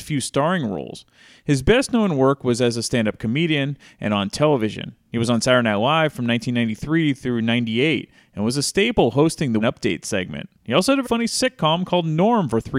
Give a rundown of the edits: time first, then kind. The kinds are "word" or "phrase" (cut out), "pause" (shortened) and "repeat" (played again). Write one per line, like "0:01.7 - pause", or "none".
0:09.6 - word
0:10.5 - pause
0:11.0 - word